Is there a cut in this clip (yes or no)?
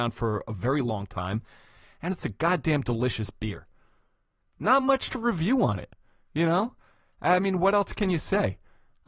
no